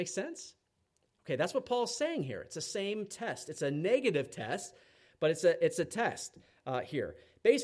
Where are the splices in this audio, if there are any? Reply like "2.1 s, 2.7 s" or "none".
none